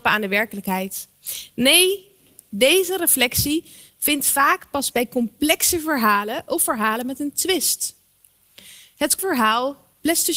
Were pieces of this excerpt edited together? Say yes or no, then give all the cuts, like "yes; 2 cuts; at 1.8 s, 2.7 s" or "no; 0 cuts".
yes; 2 cuts; at 4.9 s, 9.2 s